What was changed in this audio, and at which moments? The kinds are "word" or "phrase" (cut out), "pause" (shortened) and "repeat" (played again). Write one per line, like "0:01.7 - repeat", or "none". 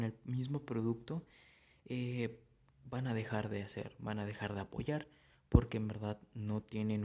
none

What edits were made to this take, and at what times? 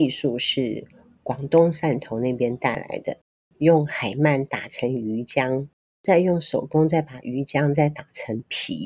none

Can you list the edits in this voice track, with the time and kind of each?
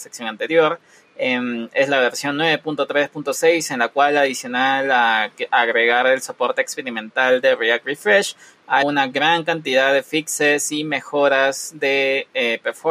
0:08.8 - word

